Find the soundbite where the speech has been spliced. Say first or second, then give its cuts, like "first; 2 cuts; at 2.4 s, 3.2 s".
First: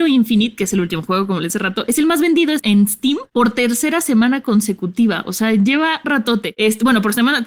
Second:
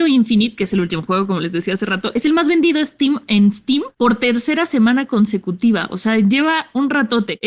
first; 3 cuts; at 1.5 s, 2.6 s, 6.0 s